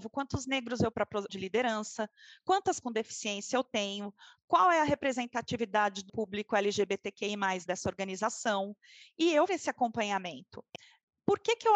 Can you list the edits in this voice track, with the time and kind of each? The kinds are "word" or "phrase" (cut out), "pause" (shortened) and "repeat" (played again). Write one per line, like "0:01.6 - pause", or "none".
0:00.9 - word
0:01.3 - word
0:02.8 - word
0:06.1 - word
0:07.7 - word
0:09.5 - word